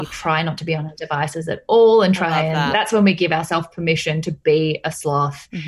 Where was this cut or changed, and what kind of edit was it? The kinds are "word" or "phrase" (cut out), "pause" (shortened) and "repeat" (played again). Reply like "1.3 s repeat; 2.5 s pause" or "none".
2.7 s word